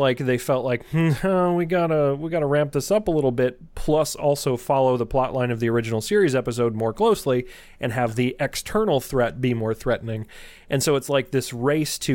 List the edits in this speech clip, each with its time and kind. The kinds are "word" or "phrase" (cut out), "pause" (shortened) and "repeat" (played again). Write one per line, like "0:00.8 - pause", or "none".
none